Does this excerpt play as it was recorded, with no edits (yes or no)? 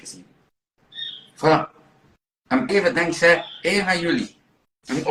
no